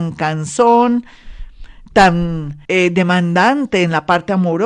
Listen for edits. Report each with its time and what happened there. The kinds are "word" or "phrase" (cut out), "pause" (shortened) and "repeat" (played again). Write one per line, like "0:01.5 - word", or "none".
0:02.6 - pause